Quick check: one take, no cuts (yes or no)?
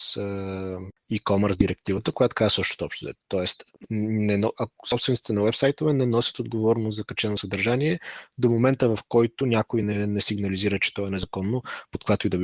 yes